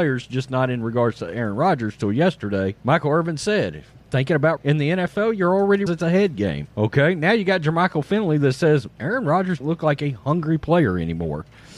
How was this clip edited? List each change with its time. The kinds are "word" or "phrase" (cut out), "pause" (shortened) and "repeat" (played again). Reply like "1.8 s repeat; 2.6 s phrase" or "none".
2.8 s pause; 4.0 s word; 4.6 s word; 5.9 s phrase; 6.7 s pause; 9.6 s word